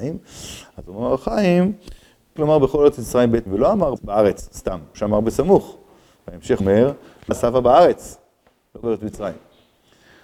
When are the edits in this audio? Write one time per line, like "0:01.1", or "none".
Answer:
0:02.4
0:03.5
0:04.0
0:04.9
0:06.6
0:07.3
0:08.8

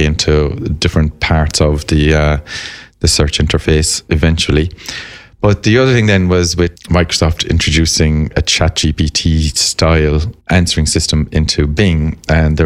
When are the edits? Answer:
0:06.8
0:08.3
0:10.4

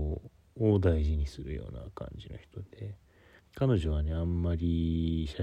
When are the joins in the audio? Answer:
0:03.4

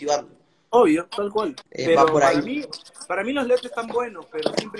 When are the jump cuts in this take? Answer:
0:01.7

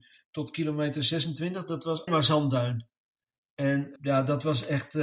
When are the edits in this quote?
0:02.1
0:04.0

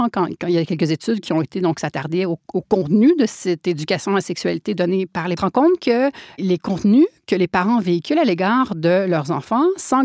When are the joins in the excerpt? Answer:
0:05.4

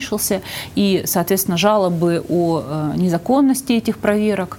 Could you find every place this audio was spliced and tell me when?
none

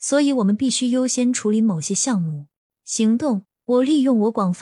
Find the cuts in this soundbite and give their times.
0:02.6

